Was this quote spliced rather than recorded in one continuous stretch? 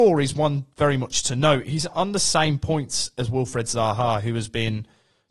no; 0 cuts

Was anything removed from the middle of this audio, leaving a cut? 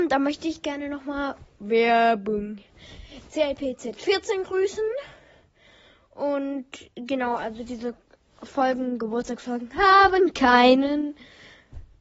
no; 0 cuts

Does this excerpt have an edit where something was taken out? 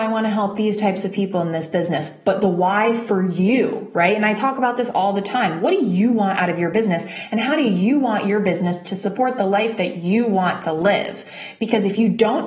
no; 0 cuts

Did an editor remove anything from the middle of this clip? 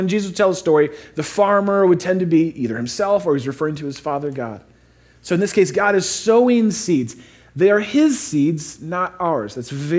no; 0 cuts

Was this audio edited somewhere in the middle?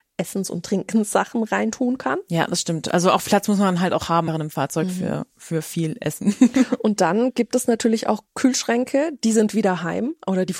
yes; 3 cuts; at 3.3 s, 4.3 s, 8.3 s

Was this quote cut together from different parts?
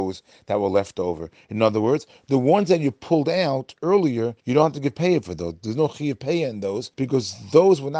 yes; 2 cuts; at 4.4 s, 6.9 s

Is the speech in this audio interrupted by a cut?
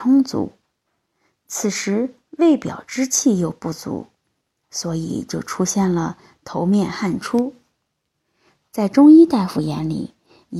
no; 0 cuts

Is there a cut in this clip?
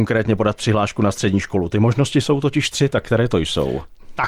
no; 0 cuts

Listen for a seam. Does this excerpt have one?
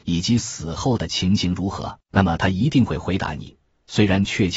yes; 1 cut; at 2.0 s

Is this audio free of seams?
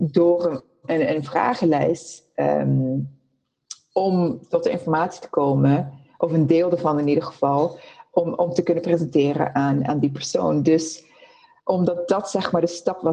yes; 0 cuts

